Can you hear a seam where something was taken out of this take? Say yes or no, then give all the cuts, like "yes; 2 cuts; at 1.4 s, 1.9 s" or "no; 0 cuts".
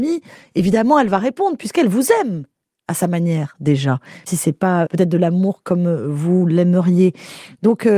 yes; 2 cuts; at 4.3 s, 4.9 s